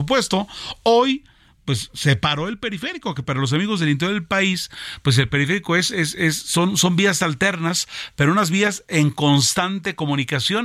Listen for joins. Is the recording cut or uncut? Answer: uncut